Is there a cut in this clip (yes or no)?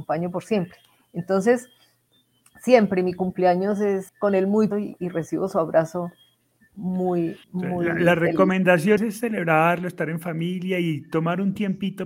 yes